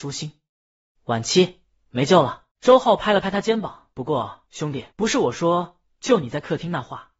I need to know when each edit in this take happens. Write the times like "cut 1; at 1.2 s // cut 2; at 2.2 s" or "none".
cut 1; at 2.5 s // cut 2; at 3.9 s // cut 3; at 4.5 s // cut 4; at 4.9 s